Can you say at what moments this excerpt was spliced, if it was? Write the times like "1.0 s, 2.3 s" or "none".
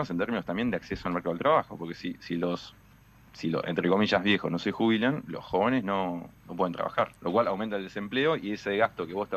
6.4 s, 7.2 s